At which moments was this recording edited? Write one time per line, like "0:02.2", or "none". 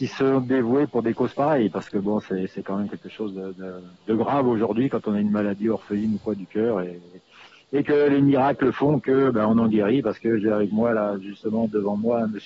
0:04.0

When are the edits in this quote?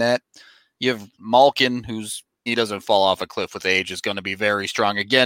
0:01.1
0:02.5

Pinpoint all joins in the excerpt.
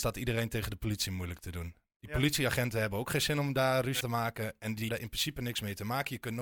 0:04.0
0:04.9

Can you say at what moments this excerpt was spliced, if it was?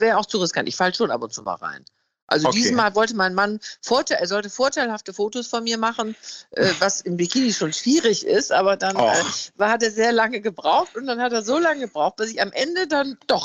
none

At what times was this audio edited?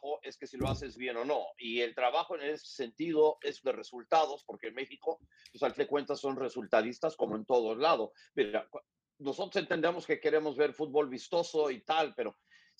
0:03.6
0:05.8

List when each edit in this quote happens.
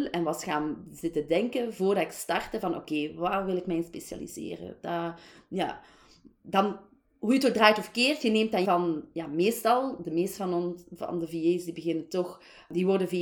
0:08.6

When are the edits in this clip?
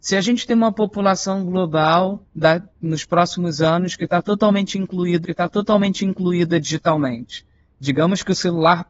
0:05.2

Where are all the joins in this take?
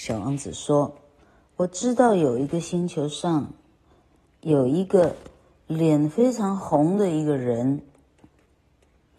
none

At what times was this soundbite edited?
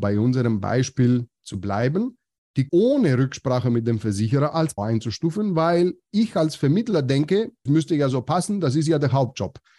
0:02.7
0:04.8
0:07.7

